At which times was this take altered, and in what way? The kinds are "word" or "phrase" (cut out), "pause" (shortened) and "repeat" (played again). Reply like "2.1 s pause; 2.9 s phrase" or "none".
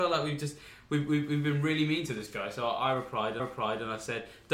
3.4 s repeat